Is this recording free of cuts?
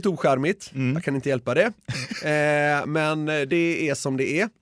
yes; 0 cuts

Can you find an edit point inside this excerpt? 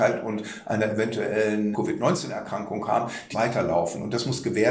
yes; 2 cuts; at 1.7 s, 3.3 s

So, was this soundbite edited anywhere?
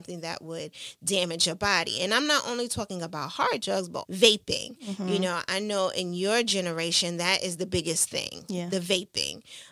yes; 1 cut; at 4.0 s

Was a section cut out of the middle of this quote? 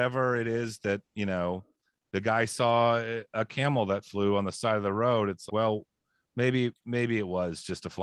yes; 1 cut; at 5.5 s

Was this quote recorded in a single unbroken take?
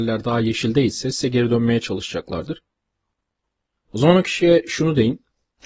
yes; 0 cuts

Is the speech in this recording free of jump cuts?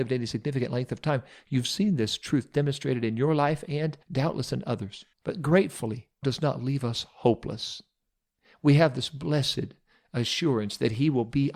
no; 3 cuts; at 4.0 s, 5.1 s, 6.2 s

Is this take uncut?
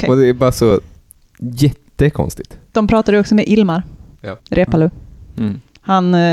no; 1 cut; at 4.4 s

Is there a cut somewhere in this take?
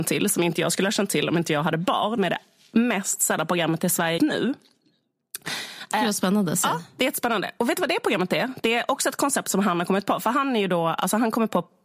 yes; 2 cuts; at 2.2 s, 4.2 s

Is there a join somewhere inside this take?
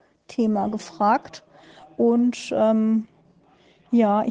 no; 0 cuts

